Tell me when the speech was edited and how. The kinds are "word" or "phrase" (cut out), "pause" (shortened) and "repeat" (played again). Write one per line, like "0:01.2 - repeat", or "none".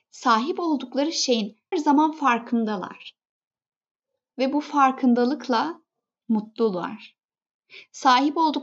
0:01.7 - word

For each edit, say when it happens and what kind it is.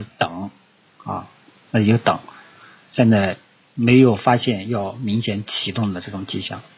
none

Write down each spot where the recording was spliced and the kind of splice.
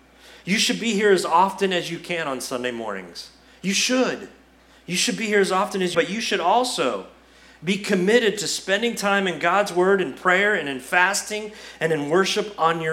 0:05.9 - phrase

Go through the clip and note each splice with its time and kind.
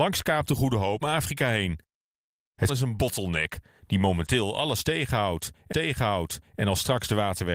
0:01.0 - word
0:02.7 - word
0:05.7 - repeat

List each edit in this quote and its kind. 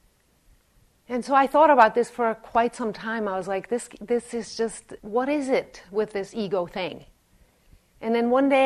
0:05.0 - pause

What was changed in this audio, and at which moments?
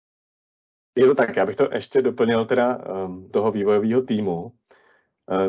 0:03.3 - phrase

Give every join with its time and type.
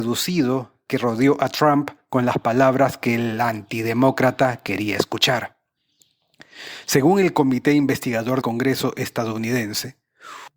0:08.4 - word

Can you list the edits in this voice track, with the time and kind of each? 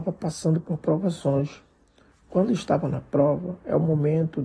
none

